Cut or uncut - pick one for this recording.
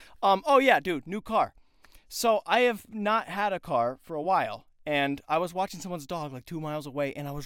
uncut